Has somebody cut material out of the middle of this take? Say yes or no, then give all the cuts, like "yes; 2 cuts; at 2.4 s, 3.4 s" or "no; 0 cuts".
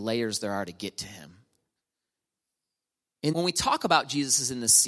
yes; 1 cut; at 3.3 s